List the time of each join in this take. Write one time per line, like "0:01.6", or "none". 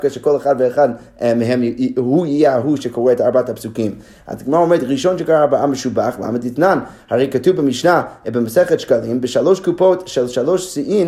none